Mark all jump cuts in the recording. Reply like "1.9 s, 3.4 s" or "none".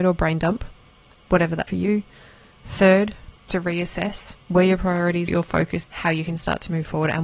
1.7 s, 3.5 s, 4.4 s, 5.3 s, 5.8 s